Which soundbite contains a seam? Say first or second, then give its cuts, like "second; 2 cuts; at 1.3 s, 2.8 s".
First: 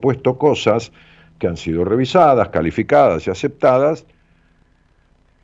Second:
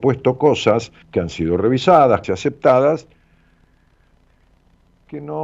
second; 2 cuts; at 1.0 s, 2.2 s